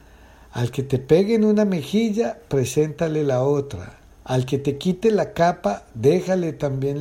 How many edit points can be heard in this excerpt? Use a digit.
1